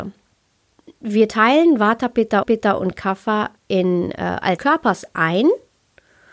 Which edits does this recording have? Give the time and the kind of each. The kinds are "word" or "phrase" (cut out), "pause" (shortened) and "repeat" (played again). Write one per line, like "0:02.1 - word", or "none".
0:02.4 - repeat
0:03.6 - pause
0:04.6 - phrase